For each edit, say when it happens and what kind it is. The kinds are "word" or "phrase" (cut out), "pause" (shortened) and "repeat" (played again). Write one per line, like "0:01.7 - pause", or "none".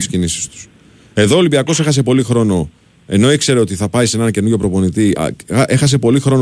0:05.2 - word